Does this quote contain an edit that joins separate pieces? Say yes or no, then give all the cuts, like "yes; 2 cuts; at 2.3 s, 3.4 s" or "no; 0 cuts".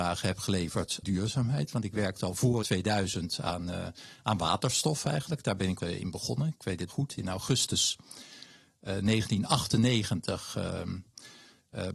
yes; 4 cuts; at 1.0 s, 2.6 s, 5.8 s, 6.9 s